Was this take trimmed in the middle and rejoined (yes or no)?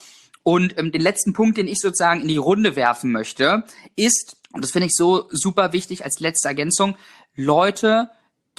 yes